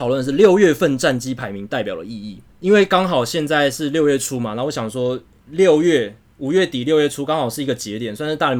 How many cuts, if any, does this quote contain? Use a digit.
1